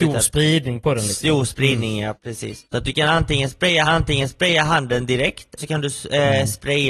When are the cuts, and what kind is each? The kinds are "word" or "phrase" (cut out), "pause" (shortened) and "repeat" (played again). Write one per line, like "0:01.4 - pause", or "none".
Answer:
0:02.1 - word
0:02.6 - pause
0:03.8 - repeat
0:05.6 - word